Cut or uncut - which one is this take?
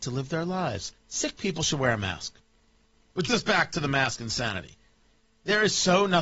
cut